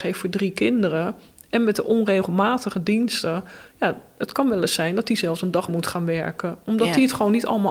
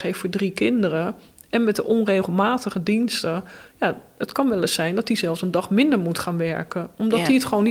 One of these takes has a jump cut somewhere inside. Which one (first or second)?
first